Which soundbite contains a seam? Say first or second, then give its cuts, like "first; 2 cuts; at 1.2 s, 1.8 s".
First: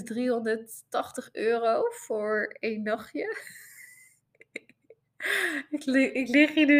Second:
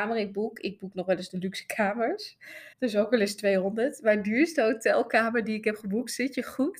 second; 1 cut; at 2.7 s